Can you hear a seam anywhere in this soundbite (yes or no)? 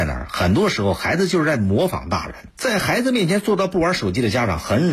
yes